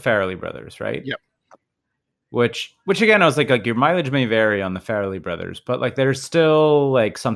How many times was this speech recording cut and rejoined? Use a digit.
0